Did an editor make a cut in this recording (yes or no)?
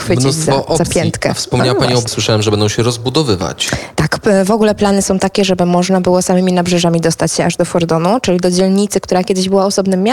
yes